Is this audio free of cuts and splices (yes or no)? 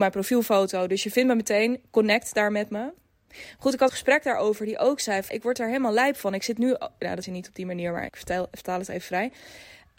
no